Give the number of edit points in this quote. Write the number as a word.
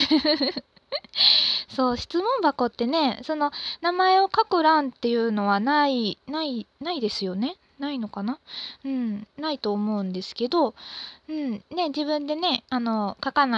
one